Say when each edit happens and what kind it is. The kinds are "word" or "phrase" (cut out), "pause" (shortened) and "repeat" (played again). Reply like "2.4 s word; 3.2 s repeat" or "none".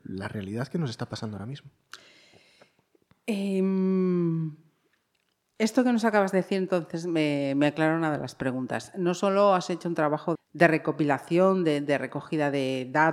10.3 s word